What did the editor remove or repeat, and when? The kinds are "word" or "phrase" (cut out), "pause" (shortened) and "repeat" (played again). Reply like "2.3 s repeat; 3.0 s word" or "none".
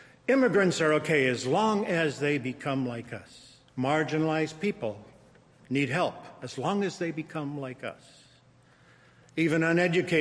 3.7 s pause